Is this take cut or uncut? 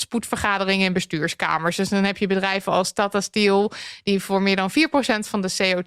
uncut